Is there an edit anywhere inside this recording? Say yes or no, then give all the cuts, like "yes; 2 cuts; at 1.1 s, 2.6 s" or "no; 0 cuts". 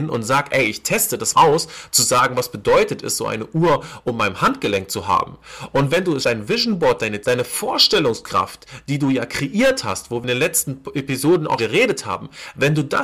yes; 4 cuts; at 1.3 s, 6.2 s, 7.2 s, 11.6 s